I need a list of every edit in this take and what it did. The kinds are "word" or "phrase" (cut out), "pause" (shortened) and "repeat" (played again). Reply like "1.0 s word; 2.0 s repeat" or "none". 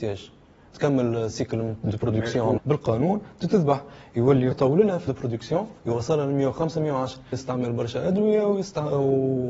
2.6 s word; 4.5 s word; 5.1 s word; 5.8 s pause; 7.3 s phrase